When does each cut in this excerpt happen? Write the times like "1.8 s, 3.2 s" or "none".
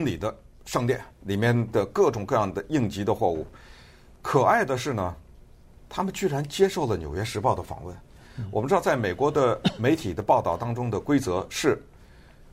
1.1 s